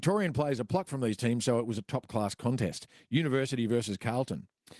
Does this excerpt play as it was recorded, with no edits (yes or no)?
yes